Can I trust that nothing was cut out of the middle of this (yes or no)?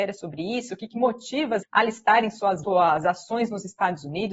no